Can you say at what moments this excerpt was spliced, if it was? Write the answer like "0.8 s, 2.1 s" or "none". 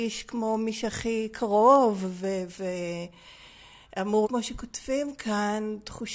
4.2 s